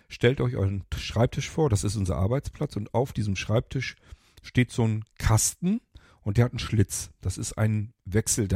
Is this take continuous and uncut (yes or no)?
yes